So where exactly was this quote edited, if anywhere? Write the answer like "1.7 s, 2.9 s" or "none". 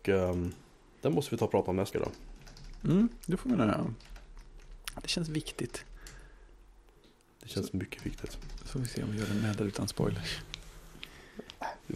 1.9 s